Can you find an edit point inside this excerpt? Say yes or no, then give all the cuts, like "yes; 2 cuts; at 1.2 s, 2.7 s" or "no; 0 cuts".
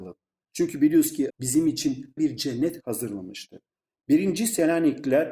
yes; 2 cuts; at 1.3 s, 2.2 s